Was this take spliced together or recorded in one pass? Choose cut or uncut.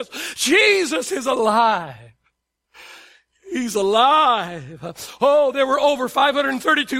uncut